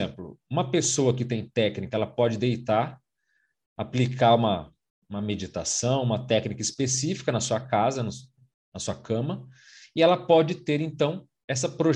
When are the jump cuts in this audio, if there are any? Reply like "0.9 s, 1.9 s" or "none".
none

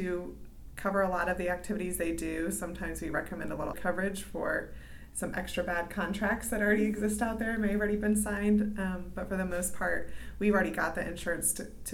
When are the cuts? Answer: 3.7 s

